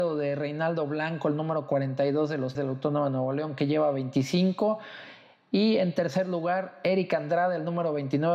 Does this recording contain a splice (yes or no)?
yes